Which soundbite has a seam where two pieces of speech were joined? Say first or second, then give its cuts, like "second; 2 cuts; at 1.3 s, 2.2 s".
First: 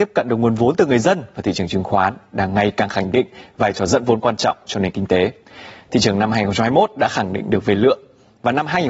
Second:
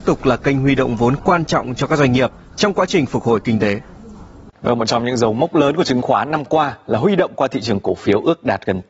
second; 1 cut; at 4.5 s